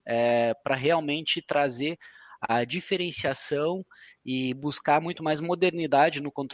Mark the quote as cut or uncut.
uncut